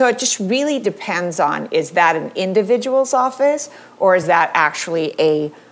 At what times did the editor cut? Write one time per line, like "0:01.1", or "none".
none